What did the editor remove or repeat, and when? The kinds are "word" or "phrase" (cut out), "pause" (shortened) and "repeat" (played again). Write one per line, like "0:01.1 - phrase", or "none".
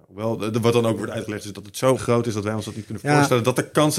0:01.0 - word
0:02.0 - word